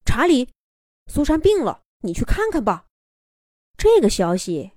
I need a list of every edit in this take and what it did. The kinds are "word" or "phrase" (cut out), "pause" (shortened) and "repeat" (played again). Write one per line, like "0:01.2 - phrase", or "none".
0:01.9 - pause
0:02.9 - pause